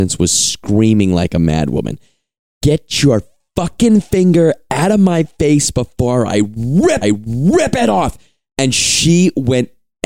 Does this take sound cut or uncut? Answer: cut